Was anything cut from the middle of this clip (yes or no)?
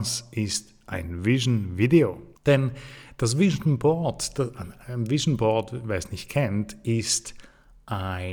yes